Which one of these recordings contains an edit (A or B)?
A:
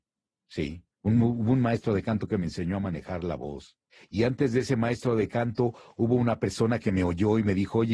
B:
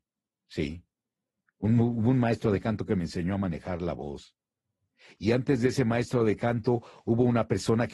A